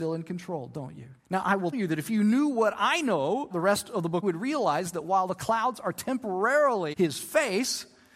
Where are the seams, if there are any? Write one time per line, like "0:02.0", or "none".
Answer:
0:01.2
0:01.7
0:03.5
0:04.2
0:06.9